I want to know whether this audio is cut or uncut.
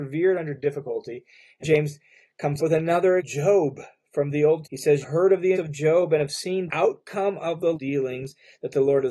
cut